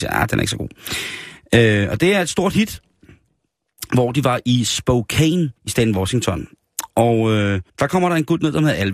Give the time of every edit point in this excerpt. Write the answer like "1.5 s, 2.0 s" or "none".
5.6 s, 7.7 s